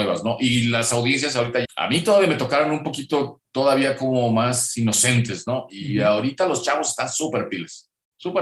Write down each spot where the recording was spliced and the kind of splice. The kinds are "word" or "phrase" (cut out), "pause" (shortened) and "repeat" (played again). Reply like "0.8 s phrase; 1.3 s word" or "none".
1.6 s word